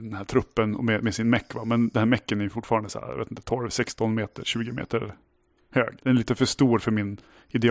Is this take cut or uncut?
cut